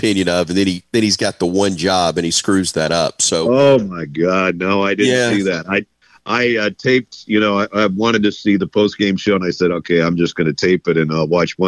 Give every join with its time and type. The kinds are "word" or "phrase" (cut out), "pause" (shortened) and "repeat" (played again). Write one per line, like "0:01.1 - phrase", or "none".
none